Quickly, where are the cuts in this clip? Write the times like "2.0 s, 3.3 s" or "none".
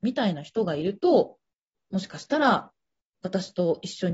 none